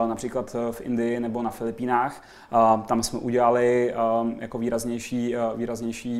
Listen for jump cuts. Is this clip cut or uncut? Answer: uncut